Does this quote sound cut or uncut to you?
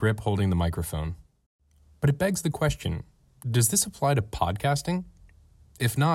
uncut